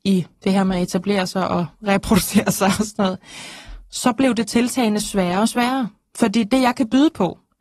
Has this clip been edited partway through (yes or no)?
no